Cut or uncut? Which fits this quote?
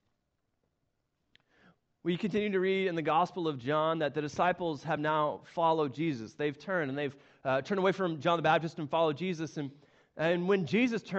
uncut